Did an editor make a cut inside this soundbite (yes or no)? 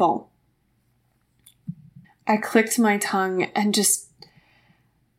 yes